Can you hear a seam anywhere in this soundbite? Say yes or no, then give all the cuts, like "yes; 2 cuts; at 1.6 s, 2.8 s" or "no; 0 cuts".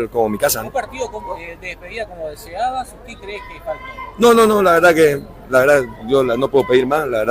no; 0 cuts